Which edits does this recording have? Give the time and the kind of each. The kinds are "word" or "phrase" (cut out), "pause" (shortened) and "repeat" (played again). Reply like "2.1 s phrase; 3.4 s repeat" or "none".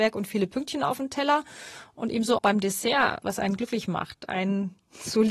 2.4 s word; 3.2 s phrase